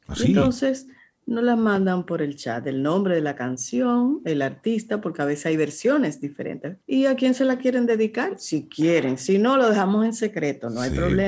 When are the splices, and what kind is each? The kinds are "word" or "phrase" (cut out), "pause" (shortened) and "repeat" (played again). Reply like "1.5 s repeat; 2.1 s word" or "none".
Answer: 6.8 s pause